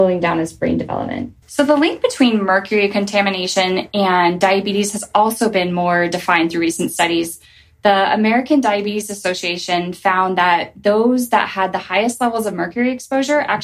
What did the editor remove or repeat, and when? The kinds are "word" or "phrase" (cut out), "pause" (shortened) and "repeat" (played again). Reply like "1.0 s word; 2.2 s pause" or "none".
1.4 s pause